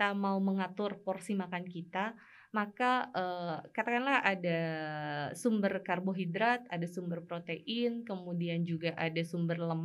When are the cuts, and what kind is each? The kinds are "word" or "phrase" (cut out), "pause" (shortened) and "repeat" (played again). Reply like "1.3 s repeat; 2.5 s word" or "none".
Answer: none